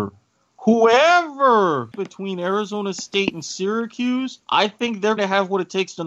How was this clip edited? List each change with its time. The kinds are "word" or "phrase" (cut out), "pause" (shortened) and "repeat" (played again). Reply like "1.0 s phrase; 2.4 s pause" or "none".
1.9 s word; 4.4 s pause; 5.2 s word